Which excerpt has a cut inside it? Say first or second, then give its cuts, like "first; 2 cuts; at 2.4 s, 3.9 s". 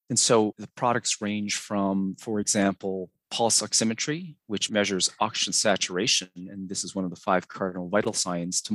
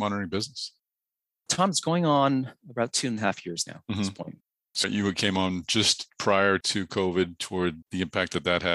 second; 1 cut; at 4.8 s